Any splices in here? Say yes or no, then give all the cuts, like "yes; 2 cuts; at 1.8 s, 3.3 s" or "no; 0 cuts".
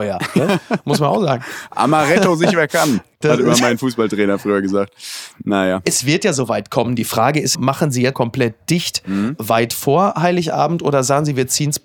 yes; 3 cuts; at 3.2 s, 7.5 s, 8.1 s